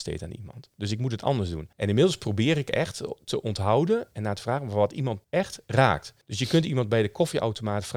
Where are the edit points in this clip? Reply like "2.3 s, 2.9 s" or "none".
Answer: 1.7 s, 5.2 s, 6.2 s